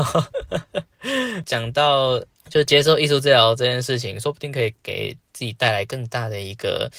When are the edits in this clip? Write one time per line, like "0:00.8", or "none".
none